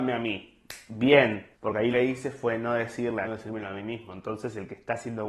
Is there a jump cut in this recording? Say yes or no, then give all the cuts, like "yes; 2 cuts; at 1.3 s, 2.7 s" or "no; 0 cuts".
yes; 3 cuts; at 1.5 s, 1.9 s, 3.2 s